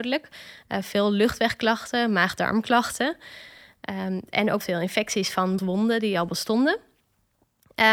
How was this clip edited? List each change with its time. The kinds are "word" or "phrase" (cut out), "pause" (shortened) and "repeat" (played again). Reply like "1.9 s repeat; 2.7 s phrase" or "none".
4.6 s word; 5.6 s word